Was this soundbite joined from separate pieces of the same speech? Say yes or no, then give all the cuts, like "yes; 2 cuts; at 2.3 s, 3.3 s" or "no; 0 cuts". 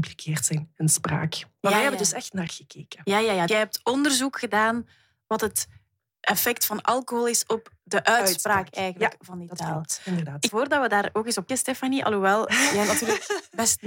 yes; 4 cuts; at 2.5 s, 3.5 s, 10.5 s, 11.5 s